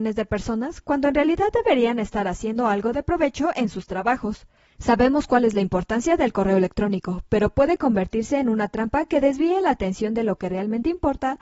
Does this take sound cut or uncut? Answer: uncut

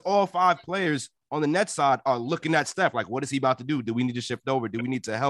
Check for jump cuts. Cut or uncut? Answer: uncut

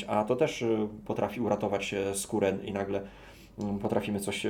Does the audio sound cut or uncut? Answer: uncut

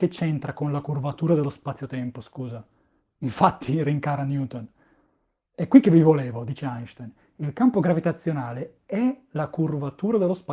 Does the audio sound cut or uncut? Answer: uncut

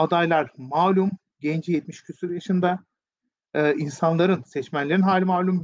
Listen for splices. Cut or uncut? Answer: uncut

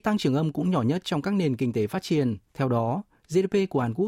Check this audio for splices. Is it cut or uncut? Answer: cut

